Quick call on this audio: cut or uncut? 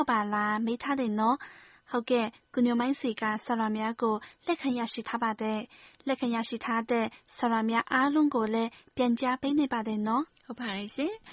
uncut